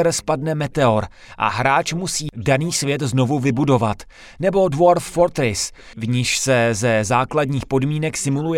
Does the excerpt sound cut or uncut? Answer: uncut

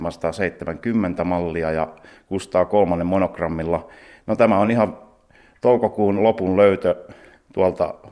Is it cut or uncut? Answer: uncut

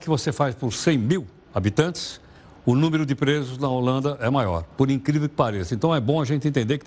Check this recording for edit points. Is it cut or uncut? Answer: uncut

